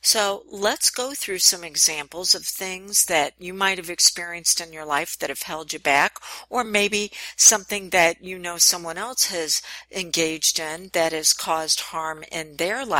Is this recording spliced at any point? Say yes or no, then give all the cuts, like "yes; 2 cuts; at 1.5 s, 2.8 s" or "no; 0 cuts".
no; 0 cuts